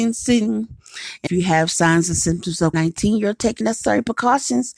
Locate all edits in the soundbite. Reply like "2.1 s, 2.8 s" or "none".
1.3 s, 2.7 s, 3.6 s